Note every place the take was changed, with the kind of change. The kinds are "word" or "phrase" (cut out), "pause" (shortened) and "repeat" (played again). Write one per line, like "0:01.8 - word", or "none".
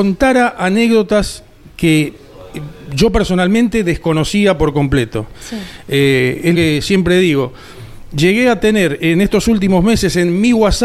0:06.5 - word